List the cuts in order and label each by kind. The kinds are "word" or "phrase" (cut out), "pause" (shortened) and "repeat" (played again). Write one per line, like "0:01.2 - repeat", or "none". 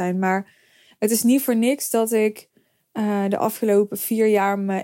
none